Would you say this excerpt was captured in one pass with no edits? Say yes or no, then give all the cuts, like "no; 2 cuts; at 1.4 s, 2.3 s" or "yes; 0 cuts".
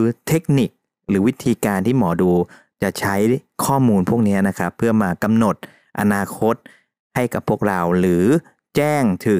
yes; 0 cuts